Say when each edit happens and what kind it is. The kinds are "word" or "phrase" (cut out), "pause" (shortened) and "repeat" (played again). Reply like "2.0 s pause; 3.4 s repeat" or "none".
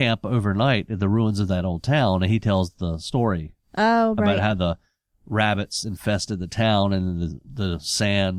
none